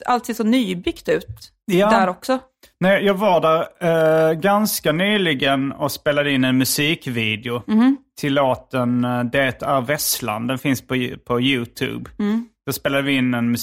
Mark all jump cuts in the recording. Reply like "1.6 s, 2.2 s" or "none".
none

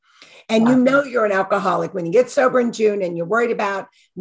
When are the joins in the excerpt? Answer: none

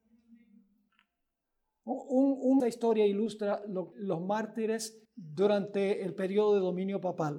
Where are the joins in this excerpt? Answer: 2.6 s, 3.9 s, 5.0 s

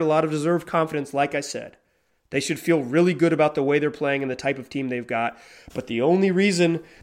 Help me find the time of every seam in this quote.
none

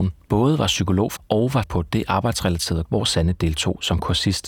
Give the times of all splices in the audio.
1.2 s, 1.6 s, 2.8 s

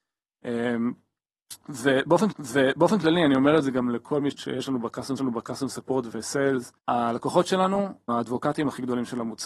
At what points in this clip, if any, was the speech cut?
2.3 s, 4.3 s, 5.2 s, 6.8 s, 8.1 s

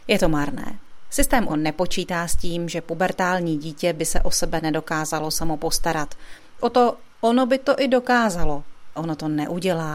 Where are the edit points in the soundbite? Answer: 1.5 s, 6.6 s, 9.0 s

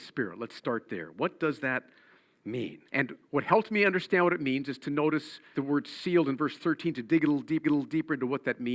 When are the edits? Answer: 2.9 s, 5.5 s, 7.6 s

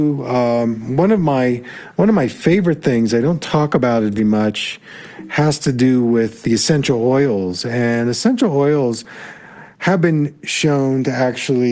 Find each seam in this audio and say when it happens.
4.2 s, 6.4 s

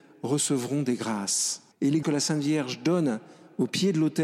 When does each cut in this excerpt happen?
1.7 s, 2.0 s

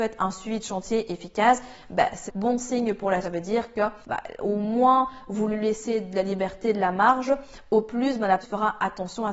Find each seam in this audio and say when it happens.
2.3 s, 3.2 s, 4.0 s, 8.4 s

